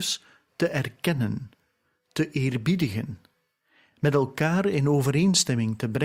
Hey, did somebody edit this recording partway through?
no; 0 cuts

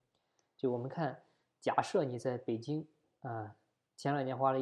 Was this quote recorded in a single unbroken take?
yes; 0 cuts

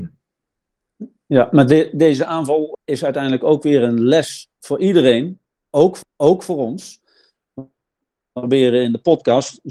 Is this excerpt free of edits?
no; 2 cuts; at 2.7 s, 6.0 s

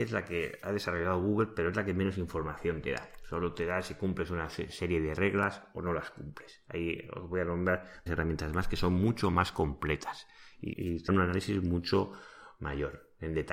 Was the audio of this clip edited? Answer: yes; 3 cuts; at 8.1 s, 10.7 s, 11.1 s

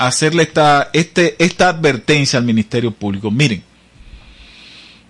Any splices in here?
no; 0 cuts

